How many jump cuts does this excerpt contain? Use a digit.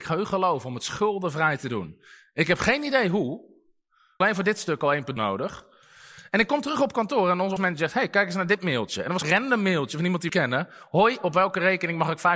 5